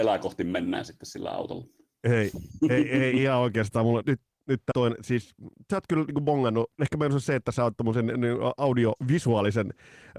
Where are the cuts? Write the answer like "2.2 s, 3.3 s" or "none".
4.0 s, 4.7 s, 6.7 s